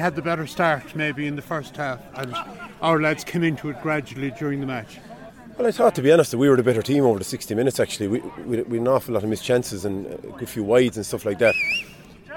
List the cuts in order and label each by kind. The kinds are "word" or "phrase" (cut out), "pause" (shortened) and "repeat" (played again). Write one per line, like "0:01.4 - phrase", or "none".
none